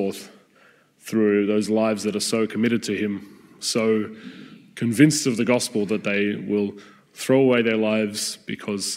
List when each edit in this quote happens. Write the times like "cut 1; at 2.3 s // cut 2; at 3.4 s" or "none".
none

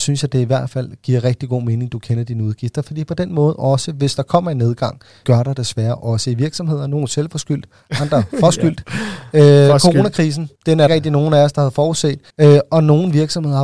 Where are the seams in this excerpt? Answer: cut 1; at 5.2 s // cut 2; at 10.6 s // cut 3; at 10.9 s // cut 4; at 12.3 s

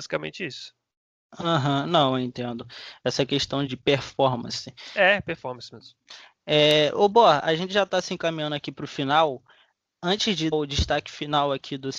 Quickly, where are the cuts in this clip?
cut 1; at 3.7 s // cut 2; at 10.5 s

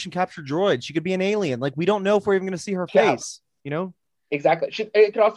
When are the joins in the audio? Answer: none

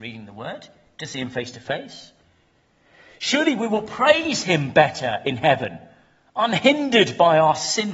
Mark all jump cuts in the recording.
none

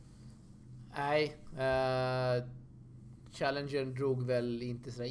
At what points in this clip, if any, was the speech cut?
none

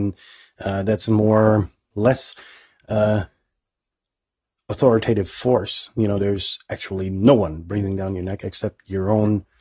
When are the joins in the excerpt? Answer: cut 1; at 1.9 s

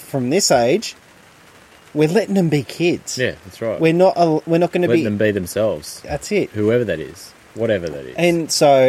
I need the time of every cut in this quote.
none

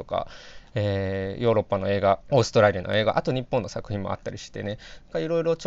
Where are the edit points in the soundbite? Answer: cut 1; at 2.2 s

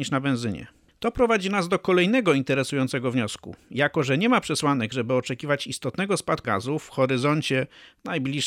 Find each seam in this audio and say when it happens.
cut 1; at 6.4 s

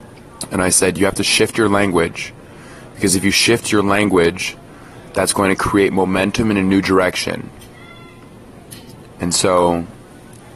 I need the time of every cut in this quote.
cut 1; at 9.1 s

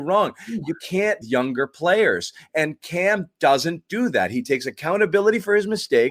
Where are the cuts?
cut 1; at 1.2 s

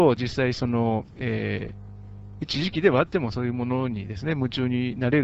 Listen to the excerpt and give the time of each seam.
cut 1; at 1.1 s

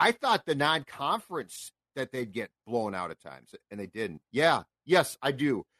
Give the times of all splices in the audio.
cut 1; at 2.6 s // cut 2; at 4.3 s

